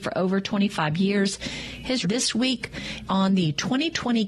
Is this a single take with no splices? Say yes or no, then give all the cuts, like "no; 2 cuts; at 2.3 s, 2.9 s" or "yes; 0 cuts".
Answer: no; 2 cuts; at 2.0 s, 3.1 s